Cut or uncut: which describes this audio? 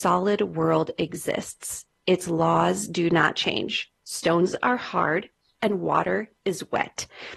uncut